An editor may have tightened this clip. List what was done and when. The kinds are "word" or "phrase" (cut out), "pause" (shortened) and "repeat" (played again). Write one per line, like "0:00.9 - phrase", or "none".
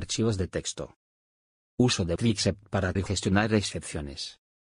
0:02.2 - word
0:03.0 - word